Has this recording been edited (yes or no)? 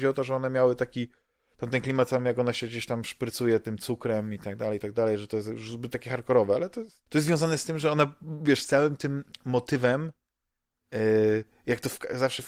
yes